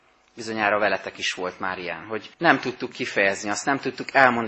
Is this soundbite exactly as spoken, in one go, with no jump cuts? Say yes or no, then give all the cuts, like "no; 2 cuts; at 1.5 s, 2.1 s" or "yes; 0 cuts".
no; 1 cut; at 2.3 s